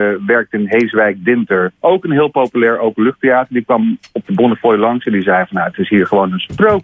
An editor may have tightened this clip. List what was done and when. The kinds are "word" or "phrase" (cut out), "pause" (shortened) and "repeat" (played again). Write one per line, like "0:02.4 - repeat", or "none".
0:01.8 - pause